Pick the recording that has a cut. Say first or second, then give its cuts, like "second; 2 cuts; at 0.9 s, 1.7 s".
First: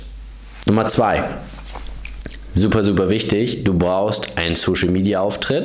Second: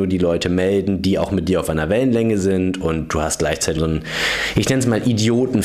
second; 1 cut; at 3.8 s